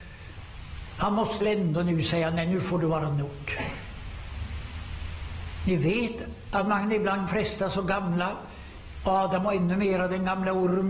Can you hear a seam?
yes; 2 cuts; at 1.4 s, 7.3 s

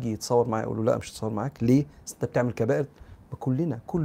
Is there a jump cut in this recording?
no; 0 cuts

